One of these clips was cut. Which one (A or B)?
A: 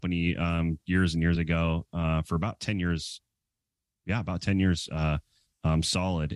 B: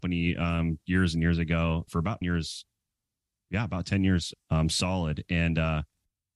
B